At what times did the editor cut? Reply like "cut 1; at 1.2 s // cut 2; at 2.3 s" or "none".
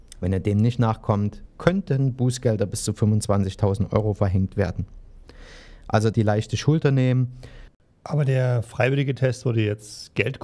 cut 1; at 6.1 s